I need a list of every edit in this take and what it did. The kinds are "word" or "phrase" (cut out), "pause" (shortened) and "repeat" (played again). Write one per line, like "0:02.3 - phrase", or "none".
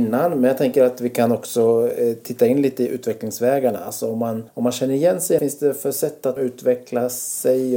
0:04.5 - pause
0:05.4 - phrase
0:06.4 - word